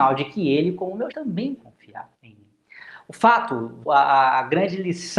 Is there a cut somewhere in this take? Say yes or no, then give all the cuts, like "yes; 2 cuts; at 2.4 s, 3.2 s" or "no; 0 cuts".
yes; 4 cuts; at 1.1 s, 1.6 s, 2.1 s, 3.9 s